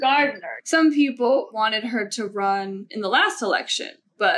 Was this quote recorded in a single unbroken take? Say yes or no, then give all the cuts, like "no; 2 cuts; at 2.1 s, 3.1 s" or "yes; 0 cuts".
yes; 0 cuts